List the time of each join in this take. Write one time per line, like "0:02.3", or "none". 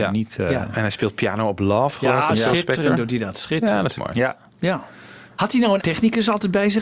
0:05.8